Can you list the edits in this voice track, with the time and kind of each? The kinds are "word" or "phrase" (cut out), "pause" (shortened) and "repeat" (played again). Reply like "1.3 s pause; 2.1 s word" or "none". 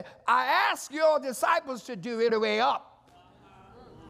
2.3 s word